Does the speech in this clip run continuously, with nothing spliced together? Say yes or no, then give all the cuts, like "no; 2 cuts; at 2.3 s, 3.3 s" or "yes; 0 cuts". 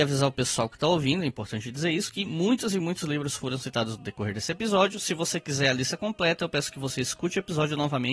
yes; 0 cuts